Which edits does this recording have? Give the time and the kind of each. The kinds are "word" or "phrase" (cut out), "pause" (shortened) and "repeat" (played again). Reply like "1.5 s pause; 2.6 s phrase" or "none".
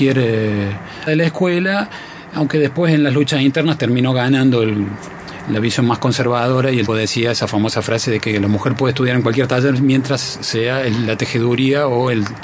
1.1 s word; 6.9 s word